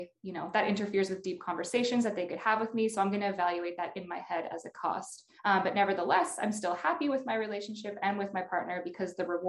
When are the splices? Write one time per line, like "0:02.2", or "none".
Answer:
0:05.4

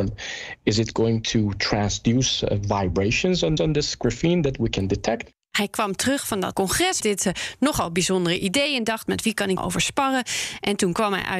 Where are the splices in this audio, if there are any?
0:03.6
0:06.5
0:07.0
0:09.6

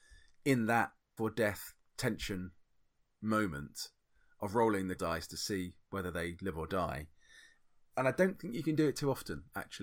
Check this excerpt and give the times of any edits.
0:01.2
0:04.9

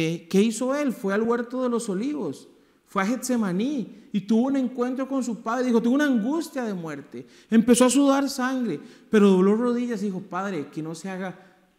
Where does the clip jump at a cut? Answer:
none

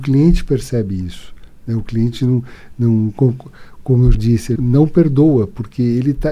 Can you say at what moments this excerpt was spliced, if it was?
0:04.1
0:04.6

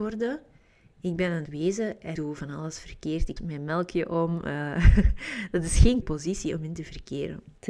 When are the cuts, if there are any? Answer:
0:01.5
0:02.2
0:03.4
0:06.0

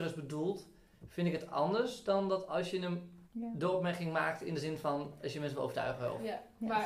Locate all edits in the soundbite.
0:03.2

